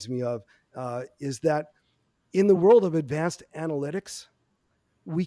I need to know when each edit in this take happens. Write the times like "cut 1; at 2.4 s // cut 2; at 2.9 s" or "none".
none